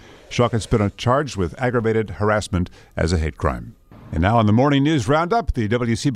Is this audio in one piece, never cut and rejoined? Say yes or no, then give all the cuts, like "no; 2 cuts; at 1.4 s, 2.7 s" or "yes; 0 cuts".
yes; 0 cuts